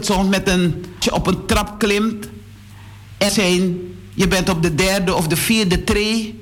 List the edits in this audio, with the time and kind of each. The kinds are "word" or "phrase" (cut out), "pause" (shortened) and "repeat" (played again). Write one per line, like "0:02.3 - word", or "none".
0:01.0 - word
0:03.3 - word